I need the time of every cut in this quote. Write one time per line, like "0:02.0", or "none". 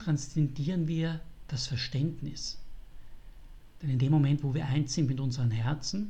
none